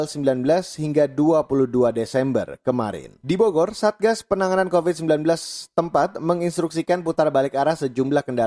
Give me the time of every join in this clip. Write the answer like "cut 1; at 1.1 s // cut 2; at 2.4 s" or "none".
none